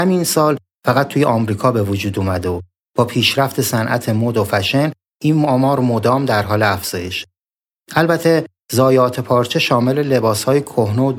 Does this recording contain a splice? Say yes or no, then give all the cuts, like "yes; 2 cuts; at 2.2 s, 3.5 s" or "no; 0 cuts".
no; 0 cuts